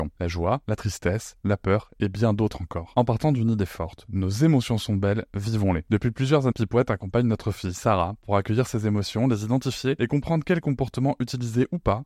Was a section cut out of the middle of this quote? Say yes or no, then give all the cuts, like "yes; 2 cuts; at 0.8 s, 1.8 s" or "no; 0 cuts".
yes; 2 cuts; at 1.4 s, 6.5 s